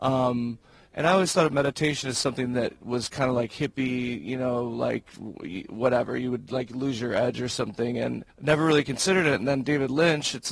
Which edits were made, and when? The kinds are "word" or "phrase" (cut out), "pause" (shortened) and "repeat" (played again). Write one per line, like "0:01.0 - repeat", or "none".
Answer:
0:08.3 - pause